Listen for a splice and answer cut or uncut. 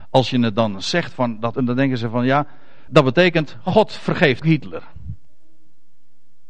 cut